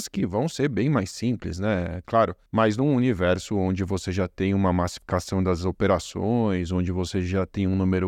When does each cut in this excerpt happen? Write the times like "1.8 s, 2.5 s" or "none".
2.5 s